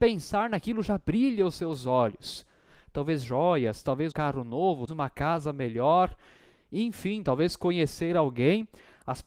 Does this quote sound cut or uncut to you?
cut